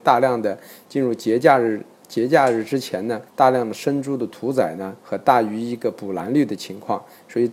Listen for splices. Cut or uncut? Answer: cut